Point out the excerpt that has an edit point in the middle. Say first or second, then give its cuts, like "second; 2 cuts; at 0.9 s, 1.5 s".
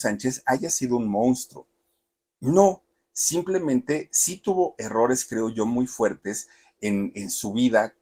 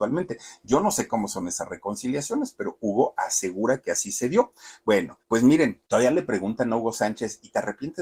second; 2 cuts; at 5.2 s, 5.9 s